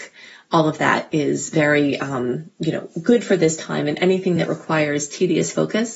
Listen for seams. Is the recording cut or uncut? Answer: uncut